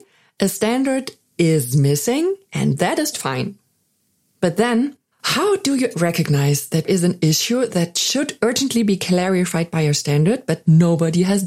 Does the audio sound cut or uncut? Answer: cut